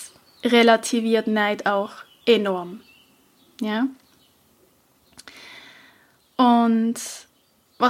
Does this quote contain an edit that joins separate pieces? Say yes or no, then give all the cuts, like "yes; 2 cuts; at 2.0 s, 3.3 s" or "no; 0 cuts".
no; 0 cuts